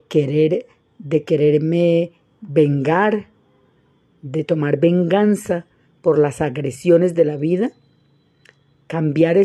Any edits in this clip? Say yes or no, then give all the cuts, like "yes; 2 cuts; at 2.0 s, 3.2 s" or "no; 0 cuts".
no; 0 cuts